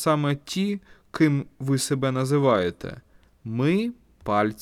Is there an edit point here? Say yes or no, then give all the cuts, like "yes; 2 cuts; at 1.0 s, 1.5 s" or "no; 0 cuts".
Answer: no; 0 cuts